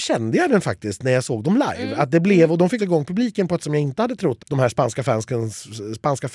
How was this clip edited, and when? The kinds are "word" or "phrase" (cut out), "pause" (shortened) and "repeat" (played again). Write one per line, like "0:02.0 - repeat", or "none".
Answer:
0:02.8 - word
0:03.6 - word
0:04.4 - word